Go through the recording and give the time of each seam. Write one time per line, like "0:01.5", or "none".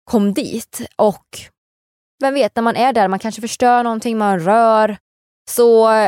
none